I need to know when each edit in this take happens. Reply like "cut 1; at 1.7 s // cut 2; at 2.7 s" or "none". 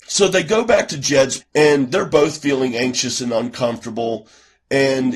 cut 1; at 1.4 s